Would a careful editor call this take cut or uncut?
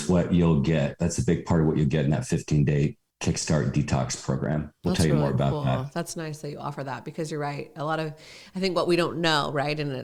uncut